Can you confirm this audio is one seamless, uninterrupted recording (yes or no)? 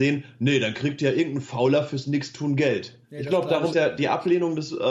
no